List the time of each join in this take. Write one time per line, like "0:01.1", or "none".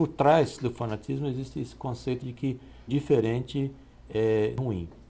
0:02.2
0:02.9